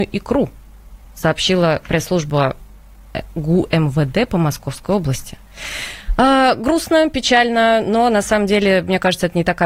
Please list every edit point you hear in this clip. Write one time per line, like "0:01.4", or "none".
none